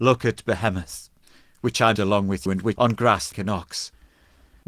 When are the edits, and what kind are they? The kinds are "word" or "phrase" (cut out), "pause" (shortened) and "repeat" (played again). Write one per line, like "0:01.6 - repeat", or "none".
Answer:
0:02.0 - word
0:02.5 - word
0:02.8 - word
0:03.3 - word